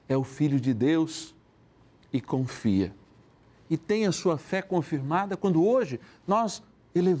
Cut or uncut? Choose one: uncut